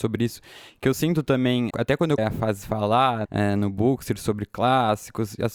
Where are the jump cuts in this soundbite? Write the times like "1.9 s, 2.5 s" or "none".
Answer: 1.7 s, 2.2 s, 3.2 s